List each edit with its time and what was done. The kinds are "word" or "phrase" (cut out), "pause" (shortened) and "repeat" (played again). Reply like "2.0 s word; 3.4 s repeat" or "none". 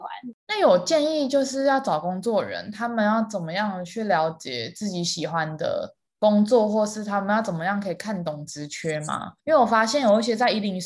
9.4 s pause